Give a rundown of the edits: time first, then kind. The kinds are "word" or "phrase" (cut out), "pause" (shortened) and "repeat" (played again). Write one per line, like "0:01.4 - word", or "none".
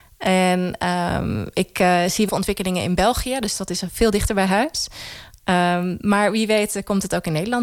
0:02.3 - word